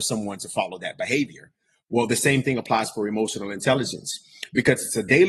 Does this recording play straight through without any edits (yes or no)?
yes